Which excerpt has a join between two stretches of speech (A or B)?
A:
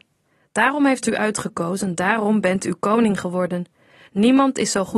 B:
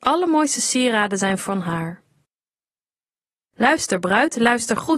A